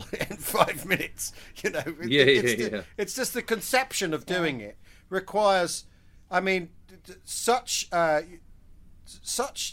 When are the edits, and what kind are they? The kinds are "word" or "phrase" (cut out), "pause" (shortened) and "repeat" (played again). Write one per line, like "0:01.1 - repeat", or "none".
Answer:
none